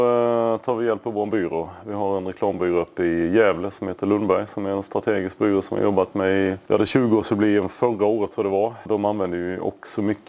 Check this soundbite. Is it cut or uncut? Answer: uncut